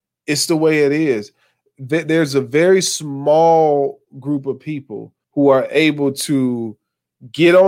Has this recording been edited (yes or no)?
yes